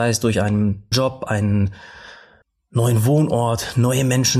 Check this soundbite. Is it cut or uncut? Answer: cut